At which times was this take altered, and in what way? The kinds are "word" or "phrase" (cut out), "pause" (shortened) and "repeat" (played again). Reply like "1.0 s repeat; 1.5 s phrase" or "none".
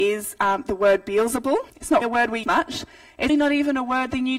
1.7 s pause; 2.0 s word; 2.4 s word; 3.3 s word